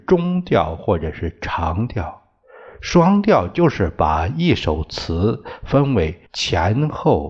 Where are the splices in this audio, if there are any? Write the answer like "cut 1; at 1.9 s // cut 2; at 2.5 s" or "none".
cut 1; at 6.3 s